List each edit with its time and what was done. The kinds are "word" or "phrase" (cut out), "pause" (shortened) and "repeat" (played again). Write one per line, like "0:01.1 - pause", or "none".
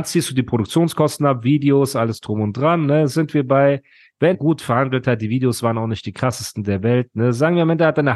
0:04.3 - word